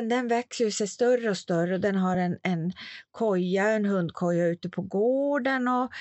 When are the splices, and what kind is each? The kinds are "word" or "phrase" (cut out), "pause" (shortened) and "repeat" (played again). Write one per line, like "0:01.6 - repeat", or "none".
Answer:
none